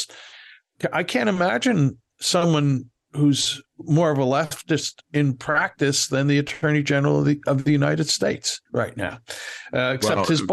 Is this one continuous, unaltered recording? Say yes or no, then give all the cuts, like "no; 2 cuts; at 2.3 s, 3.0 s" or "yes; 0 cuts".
no; 1 cut; at 8.7 s